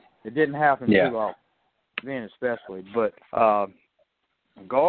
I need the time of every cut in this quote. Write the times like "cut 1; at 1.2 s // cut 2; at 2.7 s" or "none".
cut 1; at 2.0 s // cut 2; at 3.3 s